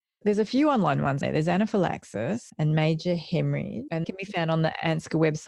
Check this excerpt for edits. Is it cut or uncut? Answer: cut